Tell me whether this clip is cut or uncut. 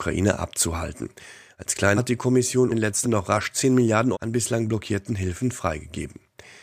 cut